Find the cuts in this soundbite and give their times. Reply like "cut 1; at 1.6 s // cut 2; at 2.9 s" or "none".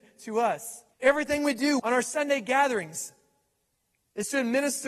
cut 1; at 0.9 s // cut 2; at 1.8 s